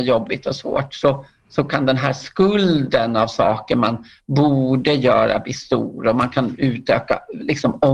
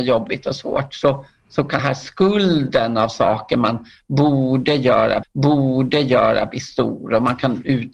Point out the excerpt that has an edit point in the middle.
second; 2 cuts; at 1.8 s, 5.2 s

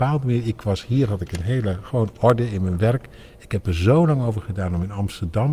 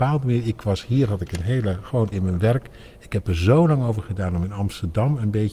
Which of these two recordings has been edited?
second; 1 cut; at 2.1 s

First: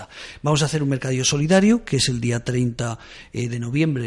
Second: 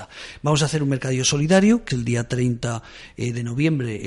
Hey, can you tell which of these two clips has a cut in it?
second; 1 cut; at 1.9 s

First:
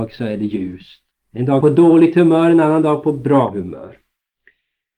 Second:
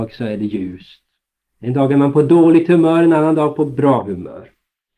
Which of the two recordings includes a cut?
first; 2 cuts; at 1.1 s, 1.6 s

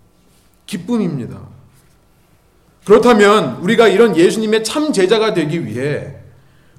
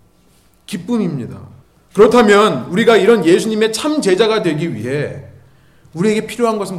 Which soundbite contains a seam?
second; 1 cut; at 1.6 s

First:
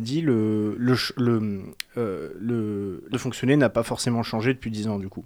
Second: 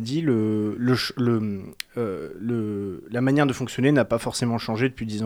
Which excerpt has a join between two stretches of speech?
first; 1 cut; at 3.1 s

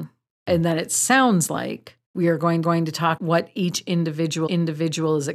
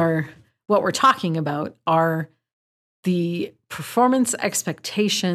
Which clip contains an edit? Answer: first; 4 cuts; at 2.0 s, 2.6 s, 3.2 s, 4.5 s

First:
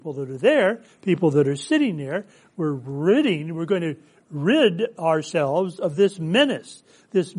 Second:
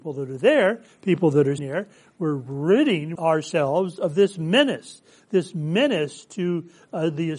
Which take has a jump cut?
second; 2 cuts; at 1.6 s, 3.2 s

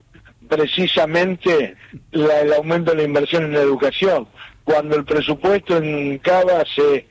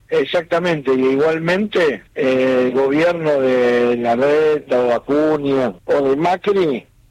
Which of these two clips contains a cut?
second; 2 cuts; at 2.1 s, 5.8 s

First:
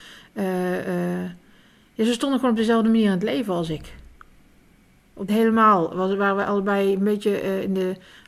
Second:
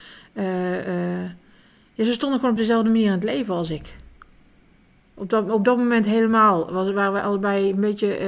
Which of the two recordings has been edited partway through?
first; 1 cut; at 5.3 s

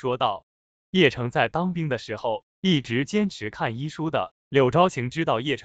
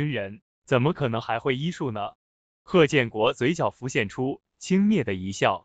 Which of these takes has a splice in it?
first; 1 cut; at 4.4 s

